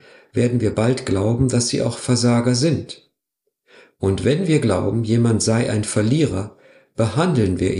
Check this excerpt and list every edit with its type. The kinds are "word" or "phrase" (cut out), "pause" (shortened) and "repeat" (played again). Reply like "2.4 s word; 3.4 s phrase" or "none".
none